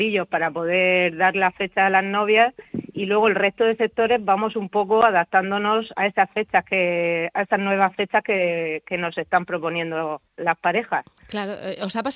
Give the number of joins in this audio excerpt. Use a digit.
2